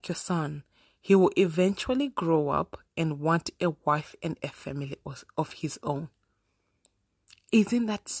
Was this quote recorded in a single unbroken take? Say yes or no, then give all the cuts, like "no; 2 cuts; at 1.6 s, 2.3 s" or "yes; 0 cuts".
yes; 0 cuts